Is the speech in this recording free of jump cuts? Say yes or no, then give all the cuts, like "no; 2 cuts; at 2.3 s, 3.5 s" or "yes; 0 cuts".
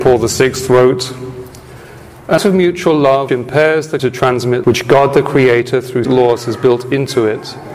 no; 5 cuts; at 2.4 s, 3.3 s, 4.0 s, 4.6 s, 6.0 s